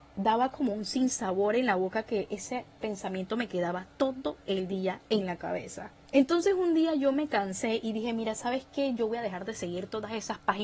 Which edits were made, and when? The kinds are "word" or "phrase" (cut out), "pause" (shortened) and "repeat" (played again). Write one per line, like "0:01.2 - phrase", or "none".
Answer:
0:06.0 - pause